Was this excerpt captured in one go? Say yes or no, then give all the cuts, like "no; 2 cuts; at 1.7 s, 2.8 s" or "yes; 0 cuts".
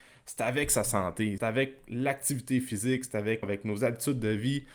no; 2 cuts; at 1.4 s, 3.4 s